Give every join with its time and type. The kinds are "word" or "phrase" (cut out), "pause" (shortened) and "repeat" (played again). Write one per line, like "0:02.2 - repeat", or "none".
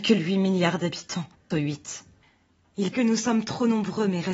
0:01.5 - word
0:02.9 - word